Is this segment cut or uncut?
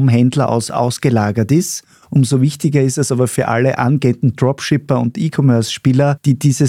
uncut